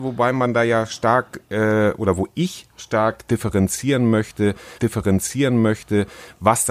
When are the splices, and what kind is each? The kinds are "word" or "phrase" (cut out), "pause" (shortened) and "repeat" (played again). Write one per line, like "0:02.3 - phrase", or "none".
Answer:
0:04.8 - repeat